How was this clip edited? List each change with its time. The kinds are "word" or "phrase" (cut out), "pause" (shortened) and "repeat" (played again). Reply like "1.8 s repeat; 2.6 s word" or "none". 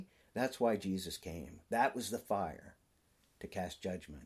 none